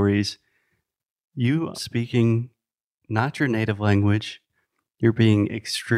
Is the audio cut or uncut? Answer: cut